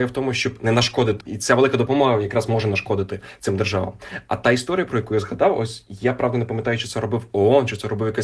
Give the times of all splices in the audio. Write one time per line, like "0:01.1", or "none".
0:01.2